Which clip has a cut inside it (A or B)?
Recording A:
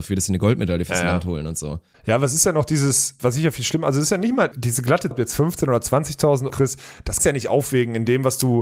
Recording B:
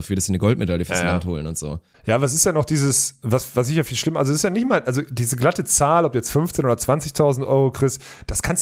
A